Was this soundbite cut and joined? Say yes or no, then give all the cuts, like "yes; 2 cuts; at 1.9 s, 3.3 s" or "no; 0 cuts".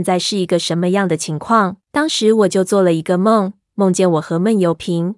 yes; 1 cut; at 1.8 s